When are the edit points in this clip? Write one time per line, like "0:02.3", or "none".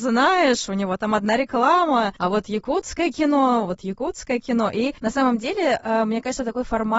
none